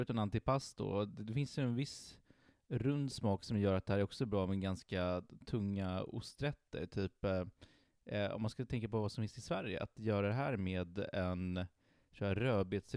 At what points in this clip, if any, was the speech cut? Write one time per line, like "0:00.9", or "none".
none